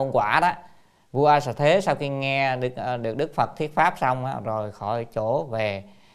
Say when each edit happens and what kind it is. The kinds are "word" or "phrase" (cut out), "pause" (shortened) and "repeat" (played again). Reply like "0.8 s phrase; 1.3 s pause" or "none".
none